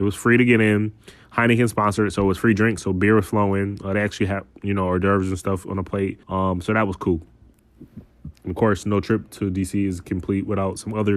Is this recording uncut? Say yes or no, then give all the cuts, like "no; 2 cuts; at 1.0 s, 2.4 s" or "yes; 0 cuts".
no; 2 cuts; at 6.2 s, 8.3 s